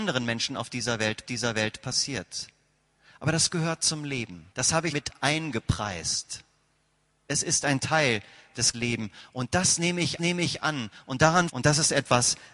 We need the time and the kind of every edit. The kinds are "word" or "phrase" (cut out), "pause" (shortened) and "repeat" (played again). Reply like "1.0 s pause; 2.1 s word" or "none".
1.3 s repeat; 4.5 s pause; 4.9 s word; 8.7 s word; 10.2 s repeat; 11.5 s phrase